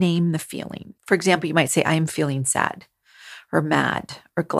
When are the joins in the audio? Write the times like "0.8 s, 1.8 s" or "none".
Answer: 1.0 s